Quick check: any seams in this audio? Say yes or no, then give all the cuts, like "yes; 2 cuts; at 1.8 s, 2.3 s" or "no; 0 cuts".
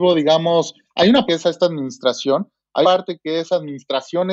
yes; 2 cuts; at 1.3 s, 2.8 s